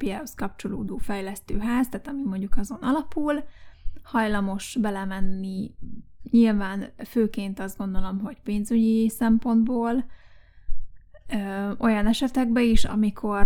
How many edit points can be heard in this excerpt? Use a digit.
0